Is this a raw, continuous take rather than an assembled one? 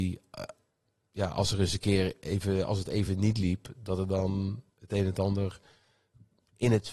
yes; 0 cuts

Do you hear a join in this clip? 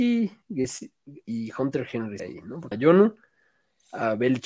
yes; 3 cuts; at 1.2 s, 2.2 s, 2.7 s

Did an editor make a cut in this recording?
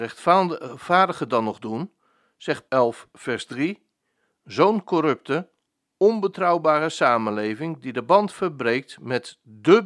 yes; 1 cut; at 2.7 s

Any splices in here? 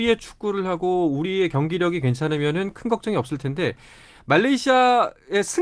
no; 0 cuts

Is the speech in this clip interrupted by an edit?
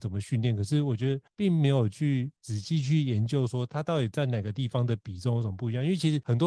yes; 1 cut; at 2.4 s

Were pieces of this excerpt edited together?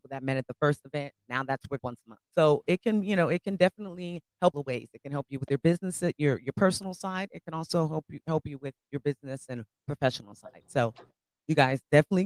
yes; 3 cuts; at 1.8 s, 2.2 s, 4.5 s

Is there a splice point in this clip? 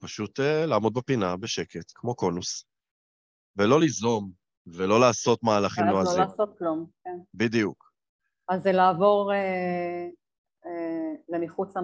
no; 0 cuts

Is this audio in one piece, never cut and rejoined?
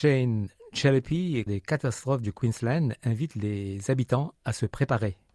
no; 2 cuts; at 1.5 s, 2.2 s

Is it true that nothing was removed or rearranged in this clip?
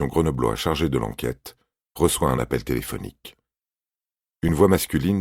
yes; 0 cuts

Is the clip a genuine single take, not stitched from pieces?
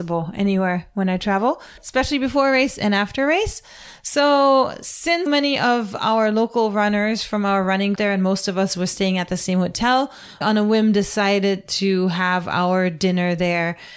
no; 3 cuts; at 5.3 s, 7.9 s, 10.4 s

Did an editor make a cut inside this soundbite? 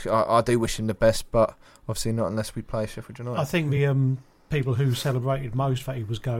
no; 0 cuts

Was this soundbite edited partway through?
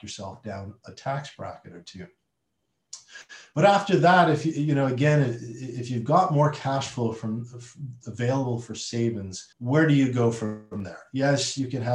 yes; 1 cut; at 9.5 s

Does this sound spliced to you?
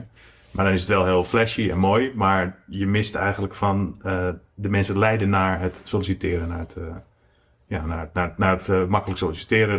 no; 0 cuts

